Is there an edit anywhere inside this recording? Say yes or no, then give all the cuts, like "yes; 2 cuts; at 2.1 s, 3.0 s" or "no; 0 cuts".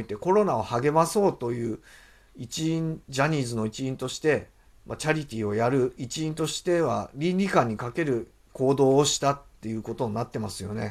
yes; 1 cut; at 4.6 s